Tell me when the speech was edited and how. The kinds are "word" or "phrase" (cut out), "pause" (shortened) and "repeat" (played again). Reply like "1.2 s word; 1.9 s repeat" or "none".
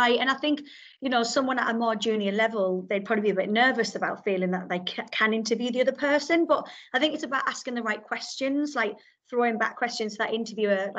none